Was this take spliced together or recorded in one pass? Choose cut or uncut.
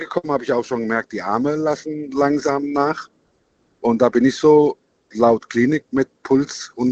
uncut